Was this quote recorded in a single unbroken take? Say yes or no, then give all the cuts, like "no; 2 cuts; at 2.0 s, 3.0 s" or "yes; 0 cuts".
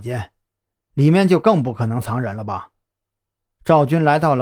yes; 0 cuts